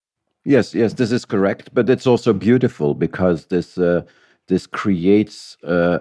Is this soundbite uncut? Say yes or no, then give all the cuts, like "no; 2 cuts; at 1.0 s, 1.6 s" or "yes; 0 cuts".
yes; 0 cuts